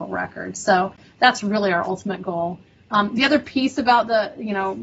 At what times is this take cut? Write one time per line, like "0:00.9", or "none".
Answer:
none